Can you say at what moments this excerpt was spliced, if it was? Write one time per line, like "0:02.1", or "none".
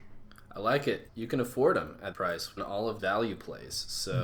0:01.1
0:02.1
0:02.6
0:03.0

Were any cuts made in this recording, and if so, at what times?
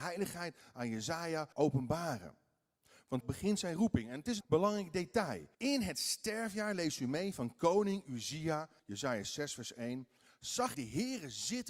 0:01.5
0:03.2
0:04.4
0:05.5
0:08.8
0:10.7

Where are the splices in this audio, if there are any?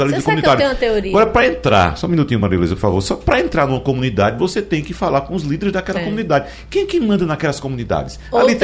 none

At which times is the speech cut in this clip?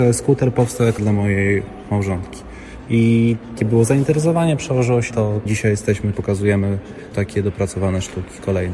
0:01.0
0:03.6
0:05.1
0:05.5
0:06.1
0:07.1

